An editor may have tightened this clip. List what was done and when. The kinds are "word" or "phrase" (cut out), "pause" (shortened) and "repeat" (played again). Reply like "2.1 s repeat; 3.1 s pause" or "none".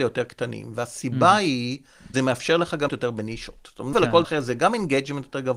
2.1 s word; 2.9 s word; 3.9 s word; 4.2 s word